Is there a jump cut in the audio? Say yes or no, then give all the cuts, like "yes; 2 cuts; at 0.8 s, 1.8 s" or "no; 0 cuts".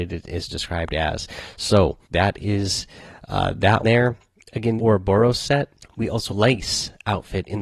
yes; 5 cuts; at 2.0 s, 3.8 s, 4.8 s, 5.8 s, 6.3 s